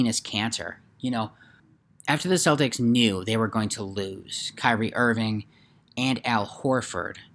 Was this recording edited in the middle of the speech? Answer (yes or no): no